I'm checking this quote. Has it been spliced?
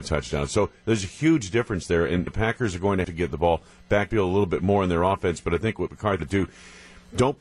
yes; 5 cuts; at 2.3 s, 3.0 s, 4.1 s, 5.9 s, 6.2 s

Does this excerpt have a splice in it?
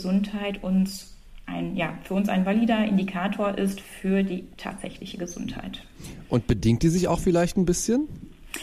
no; 0 cuts

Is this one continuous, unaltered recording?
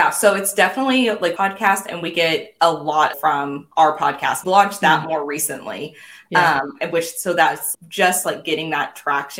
no; 6 cuts; at 1.4 s, 3.1 s, 3.7 s, 4.4 s, 7.7 s, 8.2 s

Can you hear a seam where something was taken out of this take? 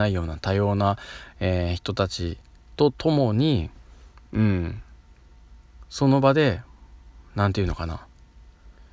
no; 0 cuts

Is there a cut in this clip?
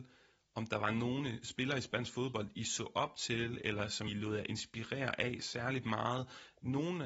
yes; 1 cut; at 4.1 s

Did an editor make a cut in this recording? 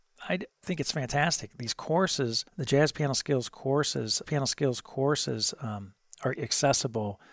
yes; 3 cuts; at 2.5 s, 4.2 s, 6.4 s

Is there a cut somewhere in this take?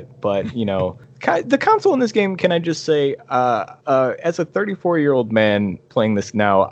yes; 1 cut; at 3.8 s

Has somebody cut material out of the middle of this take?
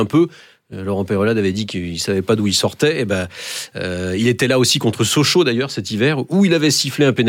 no; 0 cuts

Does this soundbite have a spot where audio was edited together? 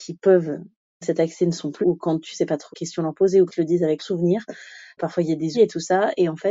yes; 7 cuts; at 1.0 s, 1.8 s, 2.7 s, 3.5 s, 4.0 s, 5.0 s, 5.5 s

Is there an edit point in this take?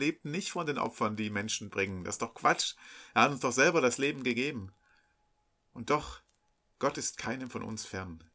no; 0 cuts

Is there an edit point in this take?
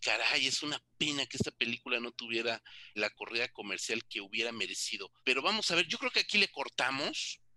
yes; 3 cuts; at 3.0 s, 4.0 s, 5.2 s

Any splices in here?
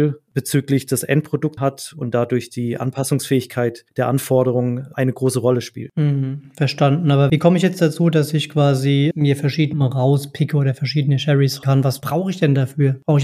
yes; 5 cuts; at 1.6 s, 4.9 s, 9.1 s, 9.7 s, 11.6 s

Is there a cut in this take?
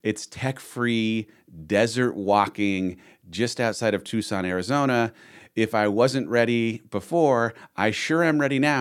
no; 0 cuts

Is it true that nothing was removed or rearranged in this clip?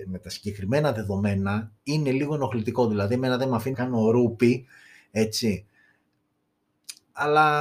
no; 1 cut; at 3.7 s

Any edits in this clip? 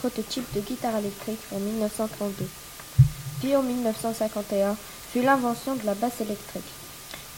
no; 0 cuts

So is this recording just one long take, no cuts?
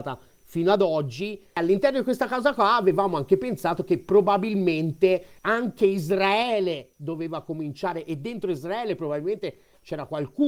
no; 1 cut; at 5.4 s

